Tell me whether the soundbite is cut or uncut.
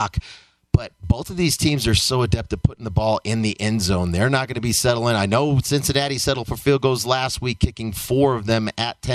uncut